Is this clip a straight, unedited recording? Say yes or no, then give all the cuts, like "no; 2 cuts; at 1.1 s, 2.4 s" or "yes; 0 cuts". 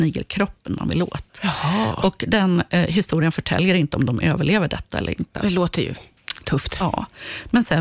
yes; 0 cuts